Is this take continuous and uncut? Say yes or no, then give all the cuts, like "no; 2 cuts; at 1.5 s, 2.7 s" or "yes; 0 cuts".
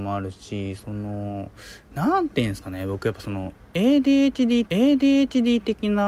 no; 1 cut; at 4.7 s